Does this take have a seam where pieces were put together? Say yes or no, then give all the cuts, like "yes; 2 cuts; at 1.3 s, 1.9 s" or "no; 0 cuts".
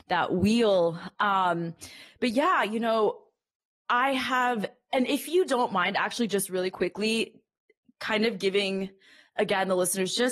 no; 0 cuts